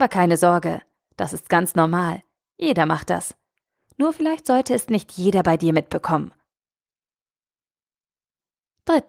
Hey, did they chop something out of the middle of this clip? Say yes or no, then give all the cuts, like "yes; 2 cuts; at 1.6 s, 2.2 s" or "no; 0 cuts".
no; 0 cuts